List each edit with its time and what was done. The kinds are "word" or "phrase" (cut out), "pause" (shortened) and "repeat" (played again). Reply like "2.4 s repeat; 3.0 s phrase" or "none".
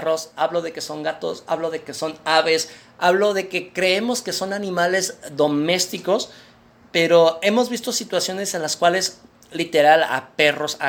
none